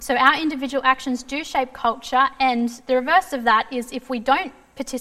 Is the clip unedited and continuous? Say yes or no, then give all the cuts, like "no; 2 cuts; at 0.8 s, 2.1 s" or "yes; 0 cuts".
yes; 0 cuts